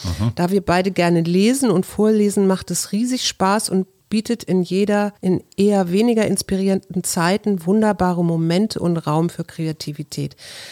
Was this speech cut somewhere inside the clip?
yes; 1 cut; at 5.2 s

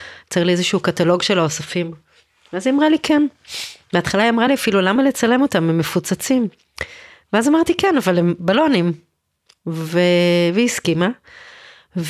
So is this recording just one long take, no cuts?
yes; 0 cuts

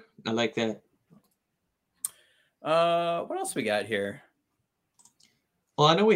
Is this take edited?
no; 0 cuts

